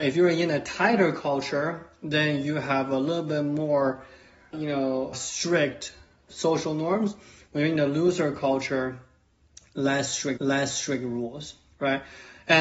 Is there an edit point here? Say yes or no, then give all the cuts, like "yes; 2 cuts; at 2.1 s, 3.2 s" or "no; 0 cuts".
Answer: yes; 3 cuts; at 4.5 s, 5.1 s, 10.4 s